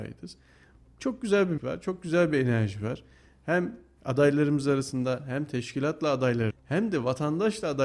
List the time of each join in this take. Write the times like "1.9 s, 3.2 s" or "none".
1.6 s, 6.5 s

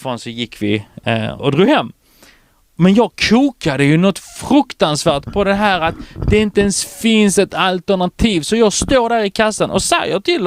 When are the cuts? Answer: 1.4 s

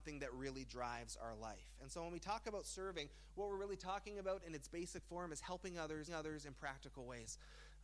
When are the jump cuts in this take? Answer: 6.1 s

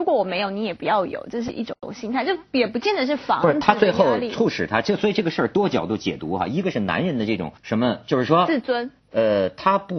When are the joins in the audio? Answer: 7.6 s, 9.0 s

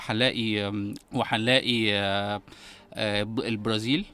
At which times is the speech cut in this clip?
1.0 s

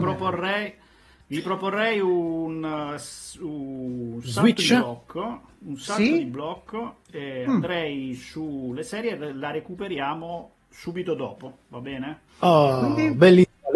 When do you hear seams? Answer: 12.3 s

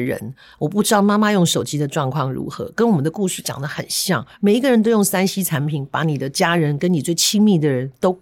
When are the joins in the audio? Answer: 4.3 s

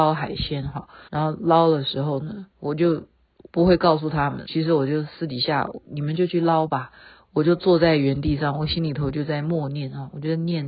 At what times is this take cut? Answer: 1.1 s, 2.5 s, 3.5 s, 4.5 s

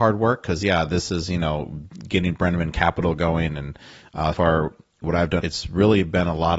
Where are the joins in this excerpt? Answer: 4.3 s, 5.4 s

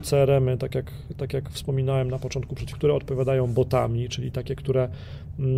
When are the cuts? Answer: 2.7 s

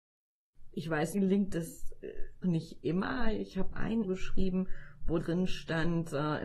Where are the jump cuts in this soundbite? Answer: 1.1 s, 2.4 s, 3.7 s, 4.0 s, 5.2 s

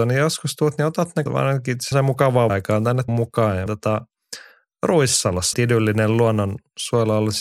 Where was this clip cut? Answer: 1.3 s, 1.9 s, 2.5 s, 3.1 s, 3.7 s, 5.5 s

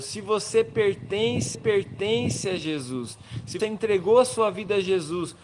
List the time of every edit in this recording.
1.5 s, 3.6 s

